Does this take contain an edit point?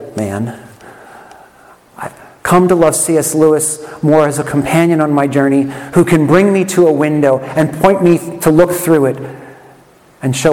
no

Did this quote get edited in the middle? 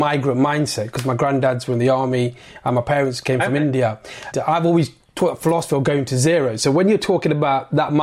yes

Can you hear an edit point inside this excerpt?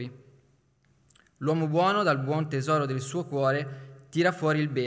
no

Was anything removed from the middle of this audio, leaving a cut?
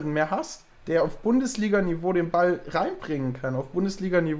no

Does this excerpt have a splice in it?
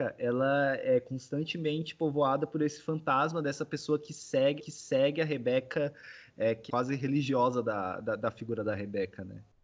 yes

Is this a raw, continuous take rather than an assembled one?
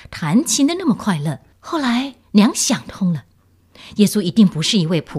no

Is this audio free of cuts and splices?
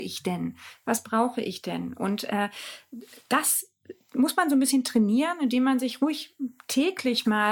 yes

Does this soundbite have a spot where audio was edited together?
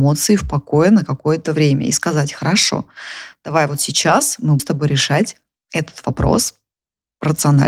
yes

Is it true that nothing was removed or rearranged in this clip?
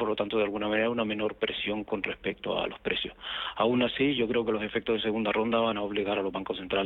yes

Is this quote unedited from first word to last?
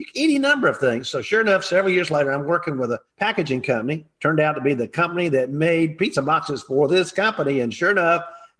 no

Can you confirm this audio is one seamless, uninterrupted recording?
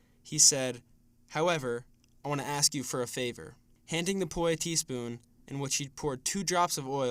yes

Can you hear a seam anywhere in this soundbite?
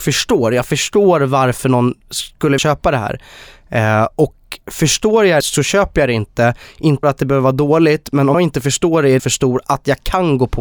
yes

